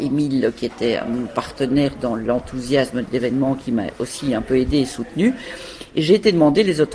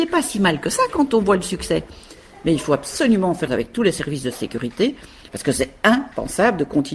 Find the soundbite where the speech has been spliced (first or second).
second